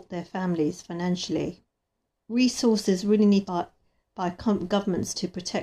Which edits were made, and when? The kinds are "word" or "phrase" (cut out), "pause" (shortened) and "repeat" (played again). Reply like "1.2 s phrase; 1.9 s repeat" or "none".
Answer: 2.1 s pause; 3.4 s phrase

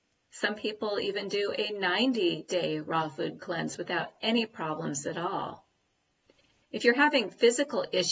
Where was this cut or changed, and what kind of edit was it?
none

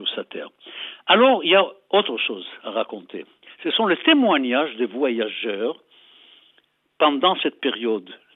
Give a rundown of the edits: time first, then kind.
none

